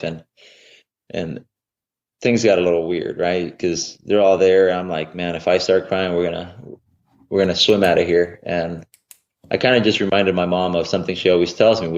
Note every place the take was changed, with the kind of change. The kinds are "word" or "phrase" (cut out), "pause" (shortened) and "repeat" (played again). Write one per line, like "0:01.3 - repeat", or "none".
none

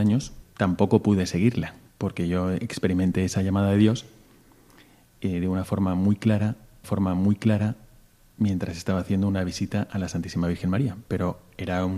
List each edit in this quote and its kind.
0:01.9 - pause
0:06.8 - repeat

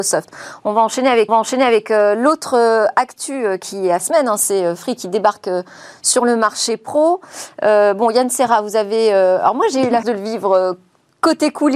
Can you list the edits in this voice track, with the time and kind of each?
0:01.3 - repeat
0:04.0 - phrase
0:10.0 - word

